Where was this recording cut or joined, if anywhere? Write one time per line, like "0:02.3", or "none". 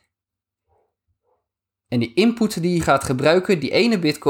0:02.8